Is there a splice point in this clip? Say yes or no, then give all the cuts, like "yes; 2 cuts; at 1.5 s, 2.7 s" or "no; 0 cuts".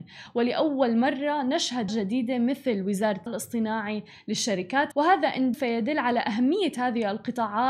yes; 4 cuts; at 1.9 s, 3.3 s, 4.9 s, 5.5 s